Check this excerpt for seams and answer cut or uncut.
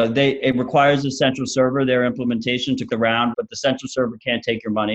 cut